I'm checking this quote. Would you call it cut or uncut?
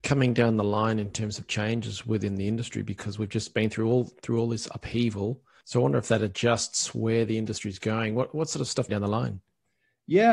cut